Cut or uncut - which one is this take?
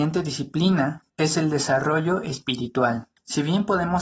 cut